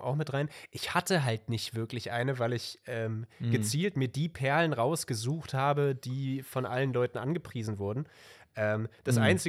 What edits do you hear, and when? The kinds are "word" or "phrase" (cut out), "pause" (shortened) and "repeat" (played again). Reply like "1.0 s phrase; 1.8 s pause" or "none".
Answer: none

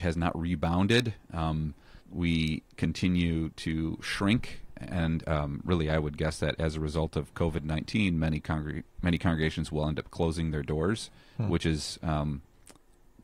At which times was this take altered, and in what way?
2.0 s pause

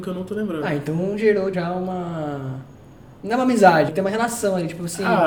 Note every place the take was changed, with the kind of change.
1.5 s word; 3.9 s word

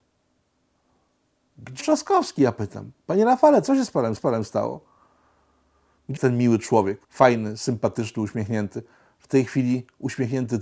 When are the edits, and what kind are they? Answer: 1.8 s phrase; 3.0 s pause; 4.2 s repeat; 6.2 s word; 7.0 s pause

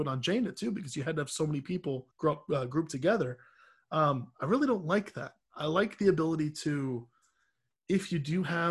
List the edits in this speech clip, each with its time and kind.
2.1 s pause

